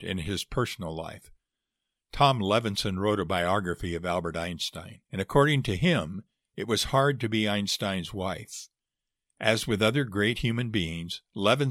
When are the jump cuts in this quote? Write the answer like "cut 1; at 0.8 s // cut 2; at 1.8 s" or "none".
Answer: cut 1; at 5.1 s